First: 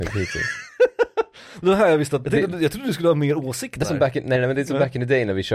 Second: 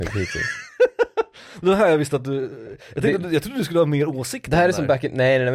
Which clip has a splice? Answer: first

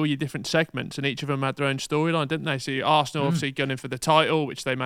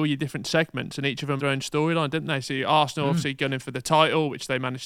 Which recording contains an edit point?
second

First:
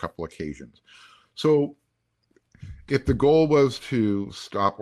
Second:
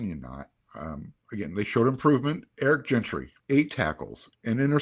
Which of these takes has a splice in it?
second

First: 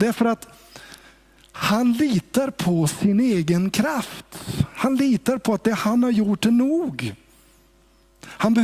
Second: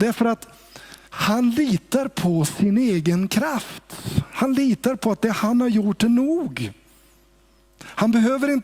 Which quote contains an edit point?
second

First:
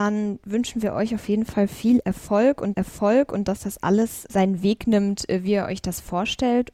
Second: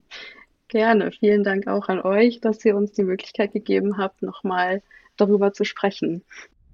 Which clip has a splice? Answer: first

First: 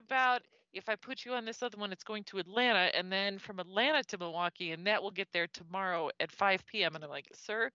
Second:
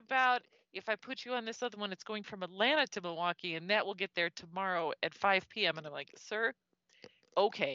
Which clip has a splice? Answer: second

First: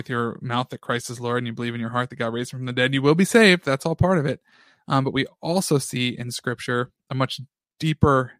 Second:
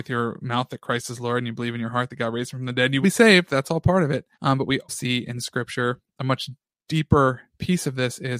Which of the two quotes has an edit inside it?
second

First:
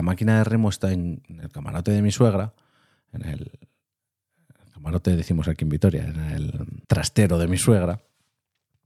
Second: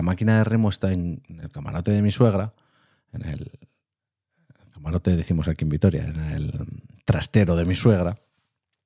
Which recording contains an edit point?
first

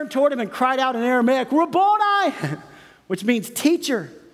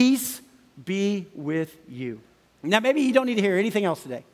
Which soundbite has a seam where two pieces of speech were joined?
second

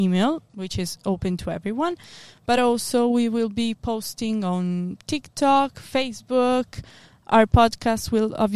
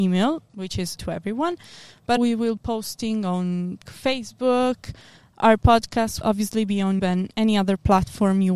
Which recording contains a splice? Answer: second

